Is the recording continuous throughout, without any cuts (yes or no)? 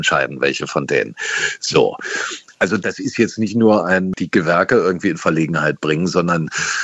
yes